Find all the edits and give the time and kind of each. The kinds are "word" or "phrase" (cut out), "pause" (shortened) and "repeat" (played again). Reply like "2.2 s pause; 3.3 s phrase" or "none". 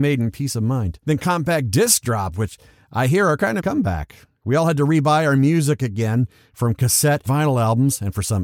3.6 s phrase; 7.3 s word

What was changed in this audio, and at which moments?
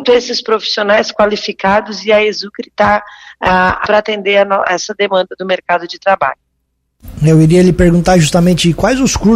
3.8 s phrase

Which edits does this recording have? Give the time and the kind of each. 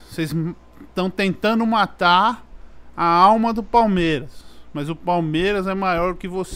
none

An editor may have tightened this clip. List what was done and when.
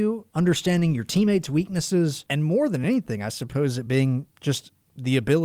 none

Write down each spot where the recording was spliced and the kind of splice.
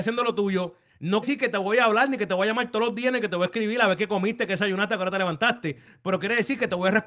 1.2 s word

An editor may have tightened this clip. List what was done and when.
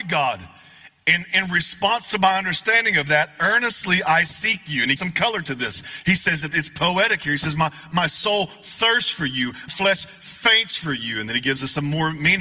5.0 s phrase; 9.7 s word

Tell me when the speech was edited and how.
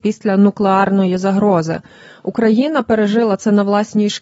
none

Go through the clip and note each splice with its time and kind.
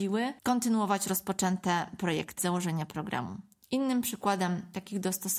2.4 s phrase; 3.6 s pause

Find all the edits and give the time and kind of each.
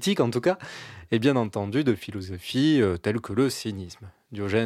none

